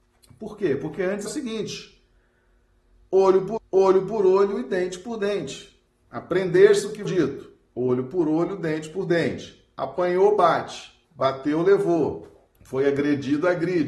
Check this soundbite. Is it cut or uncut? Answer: cut